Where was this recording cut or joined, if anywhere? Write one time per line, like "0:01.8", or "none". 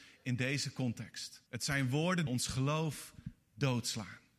0:01.5
0:02.3